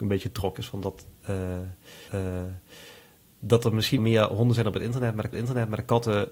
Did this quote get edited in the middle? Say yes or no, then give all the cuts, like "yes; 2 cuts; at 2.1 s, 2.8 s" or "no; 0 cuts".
yes; 3 cuts; at 2.1 s, 4.0 s, 5.3 s